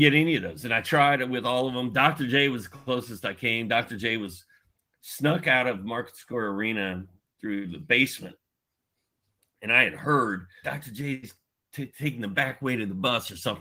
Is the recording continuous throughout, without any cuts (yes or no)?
no